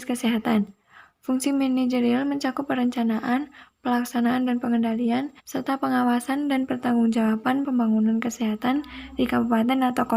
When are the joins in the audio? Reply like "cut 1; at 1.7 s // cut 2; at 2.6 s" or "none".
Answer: cut 1; at 5.4 s // cut 2; at 7.6 s